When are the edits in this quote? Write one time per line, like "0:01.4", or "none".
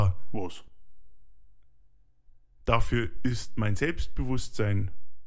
none